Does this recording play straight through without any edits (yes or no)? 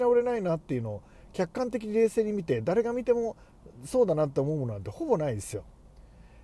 yes